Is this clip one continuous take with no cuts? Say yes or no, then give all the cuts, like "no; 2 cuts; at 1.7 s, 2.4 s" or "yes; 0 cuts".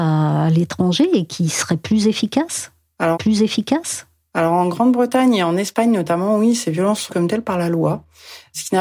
no; 2 cuts; at 3.1 s, 7.1 s